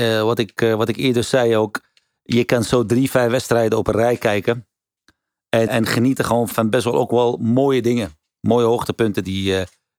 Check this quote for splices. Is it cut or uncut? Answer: cut